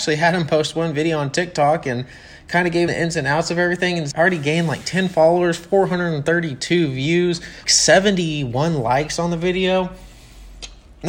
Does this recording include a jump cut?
yes; 3 cuts; at 2.9 s, 4.1 s, 7.6 s

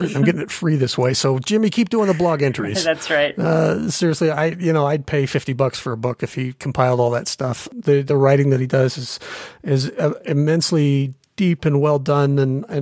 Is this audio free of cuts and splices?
yes; 0 cuts

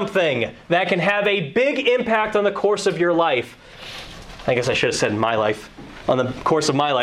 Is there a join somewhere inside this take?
no; 0 cuts

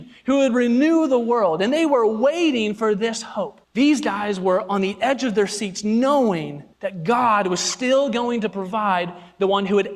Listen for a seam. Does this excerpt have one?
yes; 2 cuts; at 3.6 s, 6.7 s

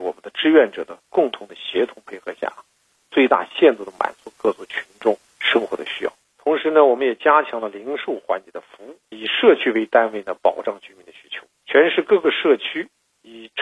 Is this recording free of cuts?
no; 1 cut; at 9.1 s

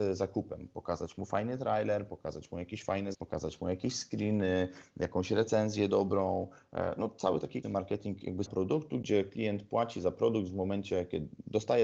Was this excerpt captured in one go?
no; 3 cuts; at 3.1 s, 7.6 s, 8.5 s

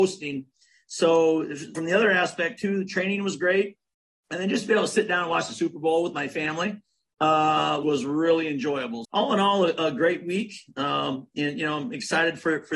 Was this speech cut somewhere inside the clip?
yes; 3 cuts; at 1.7 s, 7.8 s, 9.0 s

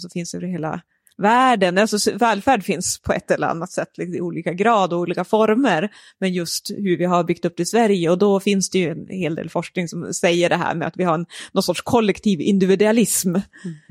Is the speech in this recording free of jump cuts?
yes; 0 cuts

